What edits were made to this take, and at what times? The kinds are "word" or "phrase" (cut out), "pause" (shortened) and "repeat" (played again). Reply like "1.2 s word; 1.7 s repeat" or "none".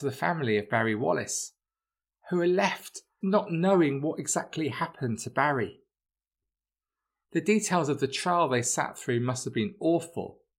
3.2 s word